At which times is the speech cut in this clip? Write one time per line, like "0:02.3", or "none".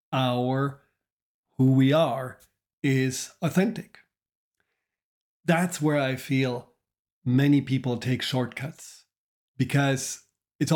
none